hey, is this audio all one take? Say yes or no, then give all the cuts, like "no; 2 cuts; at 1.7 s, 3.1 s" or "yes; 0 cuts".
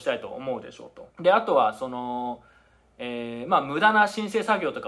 no; 1 cut; at 1.1 s